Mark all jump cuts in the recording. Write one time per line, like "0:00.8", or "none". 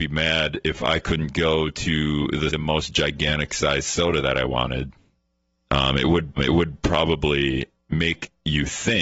0:02.5
0:05.3
0:06.4